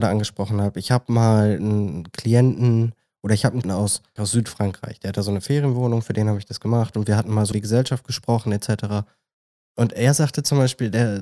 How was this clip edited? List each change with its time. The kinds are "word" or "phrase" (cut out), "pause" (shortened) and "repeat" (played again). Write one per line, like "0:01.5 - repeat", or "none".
0:03.6 - word
0:04.2 - word
0:07.5 - word